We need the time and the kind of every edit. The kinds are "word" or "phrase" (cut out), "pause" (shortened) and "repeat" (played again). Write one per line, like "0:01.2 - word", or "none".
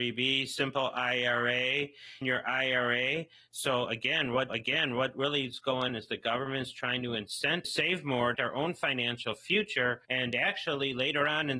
0:02.2 - word
0:04.5 - repeat
0:05.9 - word
0:07.6 - phrase
0:08.3 - phrase
0:10.0 - pause